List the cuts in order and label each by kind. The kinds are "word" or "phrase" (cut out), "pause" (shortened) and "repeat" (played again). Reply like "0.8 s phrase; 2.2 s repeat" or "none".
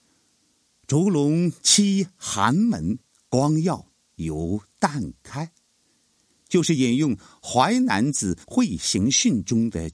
8.4 s pause